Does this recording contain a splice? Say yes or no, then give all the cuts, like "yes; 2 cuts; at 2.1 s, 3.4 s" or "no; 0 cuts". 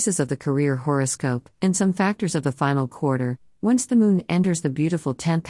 no; 0 cuts